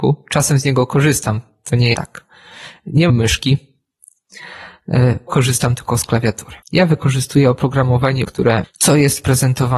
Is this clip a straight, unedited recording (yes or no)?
no